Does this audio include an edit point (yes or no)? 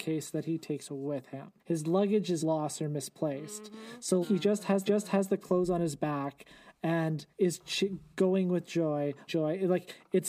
yes